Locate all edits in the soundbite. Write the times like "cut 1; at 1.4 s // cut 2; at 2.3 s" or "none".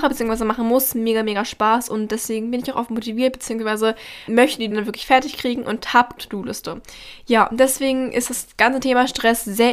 cut 1; at 4.3 s // cut 2; at 4.7 s // cut 3; at 6.2 s